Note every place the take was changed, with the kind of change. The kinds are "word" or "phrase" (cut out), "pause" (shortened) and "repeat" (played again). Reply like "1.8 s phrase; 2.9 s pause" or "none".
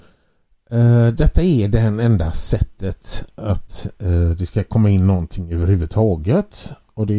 none